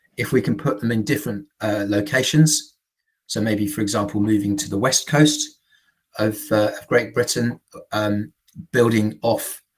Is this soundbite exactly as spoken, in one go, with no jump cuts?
yes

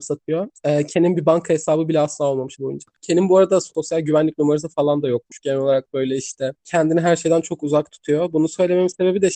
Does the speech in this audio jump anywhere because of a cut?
yes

